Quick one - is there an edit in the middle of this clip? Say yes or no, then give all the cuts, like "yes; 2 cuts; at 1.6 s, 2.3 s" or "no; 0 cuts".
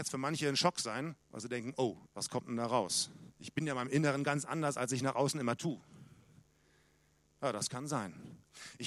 yes; 3 cuts; at 1.2 s, 2.1 s, 3.3 s